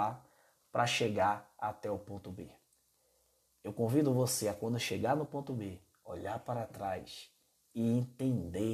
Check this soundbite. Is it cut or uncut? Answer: uncut